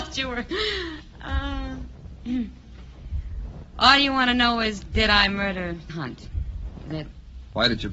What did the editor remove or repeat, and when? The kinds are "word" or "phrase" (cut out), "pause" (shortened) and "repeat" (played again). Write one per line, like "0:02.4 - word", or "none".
0:05.9 - word
0:06.9 - word